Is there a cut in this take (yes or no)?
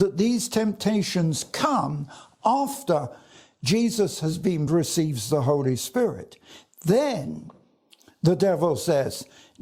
yes